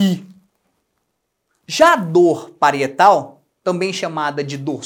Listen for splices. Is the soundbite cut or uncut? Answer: uncut